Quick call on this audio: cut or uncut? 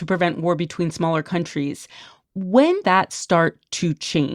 cut